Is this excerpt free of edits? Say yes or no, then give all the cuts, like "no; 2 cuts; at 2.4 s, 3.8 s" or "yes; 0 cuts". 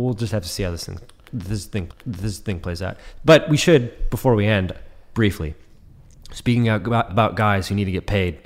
no; 3 cuts; at 1.9 s, 5.1 s, 7.1 s